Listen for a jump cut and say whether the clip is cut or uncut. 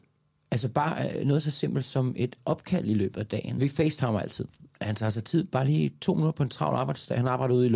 uncut